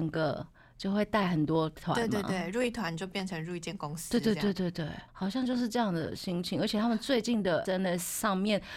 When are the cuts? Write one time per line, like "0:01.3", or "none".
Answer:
0:05.1
0:07.6